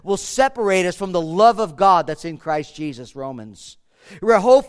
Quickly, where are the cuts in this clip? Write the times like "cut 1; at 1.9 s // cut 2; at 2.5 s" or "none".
none